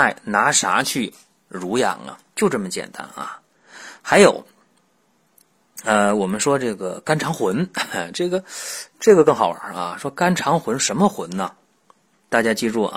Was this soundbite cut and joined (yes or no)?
yes